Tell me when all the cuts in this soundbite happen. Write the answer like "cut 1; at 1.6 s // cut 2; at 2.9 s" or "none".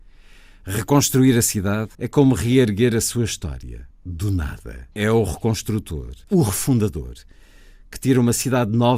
cut 1; at 1.9 s // cut 2; at 3.9 s // cut 3; at 4.9 s // cut 4; at 6.2 s